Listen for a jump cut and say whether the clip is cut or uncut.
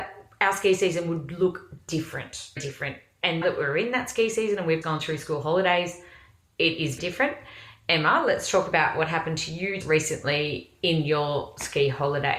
cut